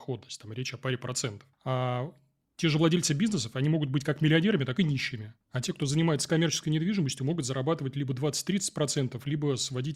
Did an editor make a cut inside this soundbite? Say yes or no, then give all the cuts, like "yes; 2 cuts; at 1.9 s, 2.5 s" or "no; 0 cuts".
yes; 2 cuts; at 1.5 s, 5.4 s